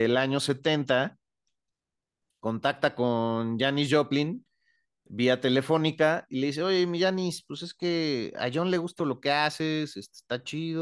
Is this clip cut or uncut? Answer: cut